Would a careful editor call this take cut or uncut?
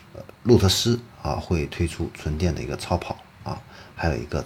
uncut